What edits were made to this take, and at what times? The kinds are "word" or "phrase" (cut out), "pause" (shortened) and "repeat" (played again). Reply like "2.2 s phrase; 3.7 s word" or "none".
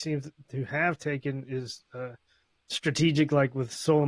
none